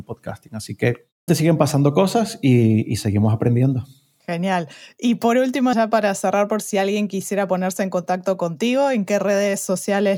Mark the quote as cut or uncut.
cut